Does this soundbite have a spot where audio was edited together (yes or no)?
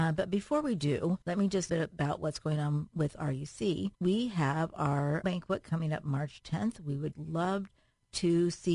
yes